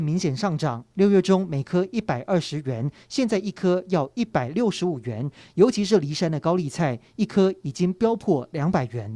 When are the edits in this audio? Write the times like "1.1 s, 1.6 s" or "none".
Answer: none